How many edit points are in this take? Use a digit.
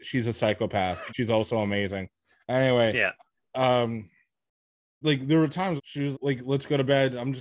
4